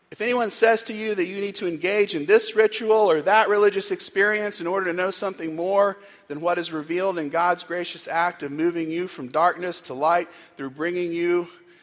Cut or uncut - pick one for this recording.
uncut